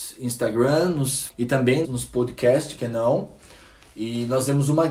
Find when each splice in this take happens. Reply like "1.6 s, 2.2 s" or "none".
1.3 s, 1.8 s, 2.8 s